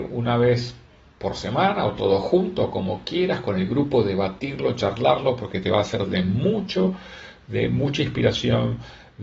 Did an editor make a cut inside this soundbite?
no; 0 cuts

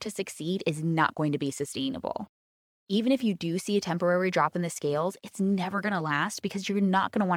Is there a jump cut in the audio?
no; 0 cuts

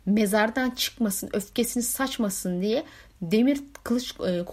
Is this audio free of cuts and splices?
yes; 0 cuts

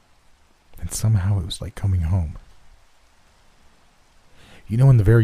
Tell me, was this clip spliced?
yes; 1 cut; at 1.6 s

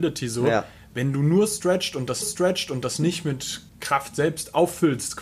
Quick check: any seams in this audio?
yes; 2 cuts; at 2.2 s, 3.7 s

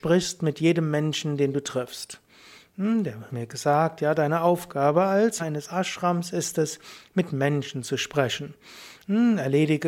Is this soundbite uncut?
no; 2 cuts; at 3.3 s, 5.4 s

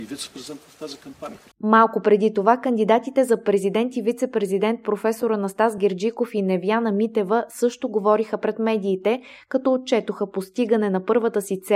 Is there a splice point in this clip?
no; 0 cuts

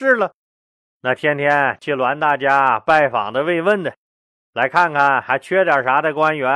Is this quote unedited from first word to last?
yes; 0 cuts

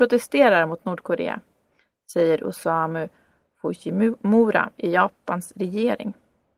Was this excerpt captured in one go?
yes; 0 cuts

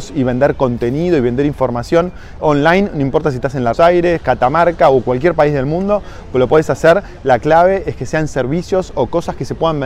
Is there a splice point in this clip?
yes; 2 cuts; at 2.4 s, 3.7 s

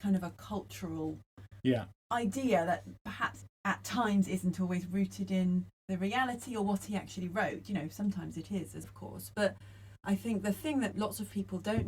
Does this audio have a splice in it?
yes; 3 cuts; at 5.8 s, 8.8 s, 10.9 s

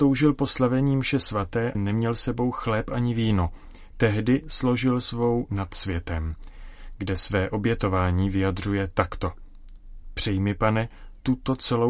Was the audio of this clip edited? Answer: yes; 2 cuts; at 1.7 s, 5.5 s

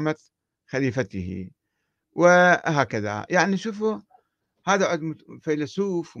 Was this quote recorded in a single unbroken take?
yes; 0 cuts

